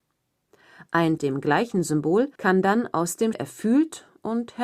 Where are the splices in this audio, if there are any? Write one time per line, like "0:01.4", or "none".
0:01.2
0:02.4
0:03.3